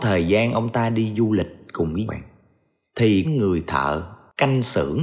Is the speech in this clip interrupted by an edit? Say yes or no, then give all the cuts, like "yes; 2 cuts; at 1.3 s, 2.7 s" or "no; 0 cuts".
yes; 2 cuts; at 2.1 s, 3.2 s